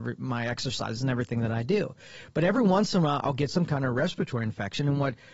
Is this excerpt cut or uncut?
uncut